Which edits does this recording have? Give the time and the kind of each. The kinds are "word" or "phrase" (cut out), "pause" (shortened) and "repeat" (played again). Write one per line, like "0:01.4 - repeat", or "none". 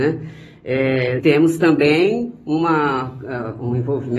0:01.2 - word